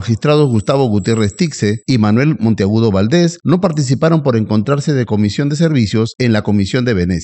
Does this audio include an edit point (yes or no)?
no